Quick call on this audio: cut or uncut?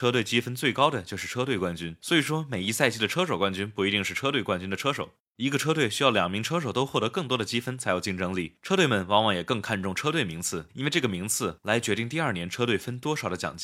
cut